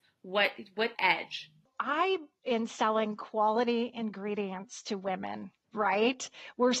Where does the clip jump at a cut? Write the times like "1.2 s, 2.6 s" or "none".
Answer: 0.9 s, 2.4 s